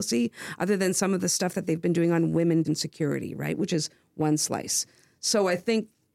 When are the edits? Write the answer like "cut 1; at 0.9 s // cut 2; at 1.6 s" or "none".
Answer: cut 1; at 2.6 s